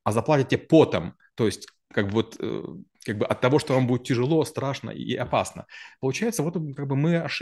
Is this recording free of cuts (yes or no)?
yes